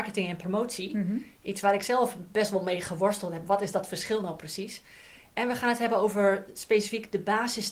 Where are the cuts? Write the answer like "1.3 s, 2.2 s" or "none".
none